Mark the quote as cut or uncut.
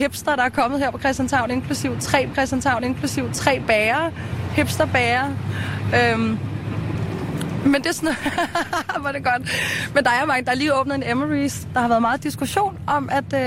cut